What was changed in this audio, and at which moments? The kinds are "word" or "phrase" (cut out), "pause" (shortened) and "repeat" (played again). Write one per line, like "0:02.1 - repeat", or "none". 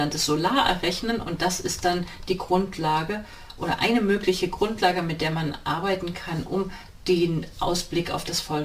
none